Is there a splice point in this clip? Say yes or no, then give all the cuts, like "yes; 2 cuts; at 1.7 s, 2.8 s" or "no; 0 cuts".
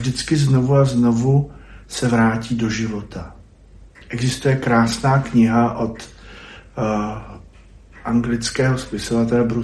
no; 0 cuts